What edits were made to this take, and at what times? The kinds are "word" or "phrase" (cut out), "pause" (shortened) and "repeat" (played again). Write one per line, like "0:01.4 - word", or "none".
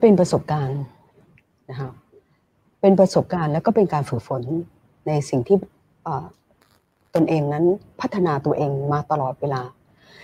none